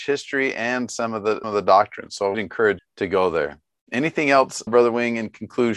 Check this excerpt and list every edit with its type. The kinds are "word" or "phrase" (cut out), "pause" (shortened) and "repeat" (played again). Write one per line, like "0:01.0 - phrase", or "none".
0:01.4 - word
0:02.3 - word
0:02.8 - word
0:04.7 - word